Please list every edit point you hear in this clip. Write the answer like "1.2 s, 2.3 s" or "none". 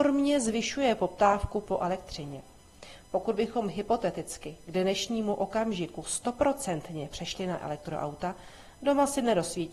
none